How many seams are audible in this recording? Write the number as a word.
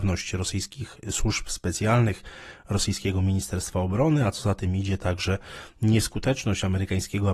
zero